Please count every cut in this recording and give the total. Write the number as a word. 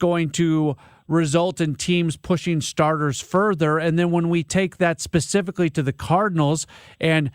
zero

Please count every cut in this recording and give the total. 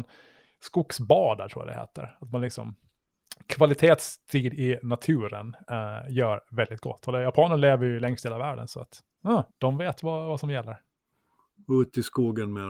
one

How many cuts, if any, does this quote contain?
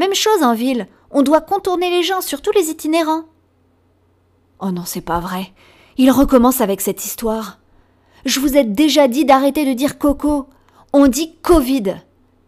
zero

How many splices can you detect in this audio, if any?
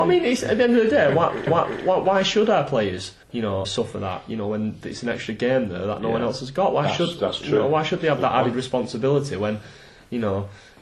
three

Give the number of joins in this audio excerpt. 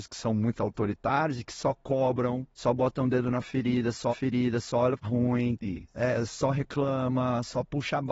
three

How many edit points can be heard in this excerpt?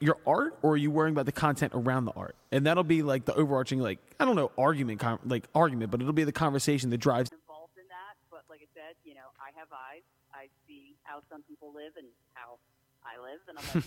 zero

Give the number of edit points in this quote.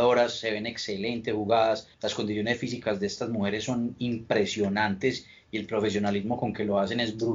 one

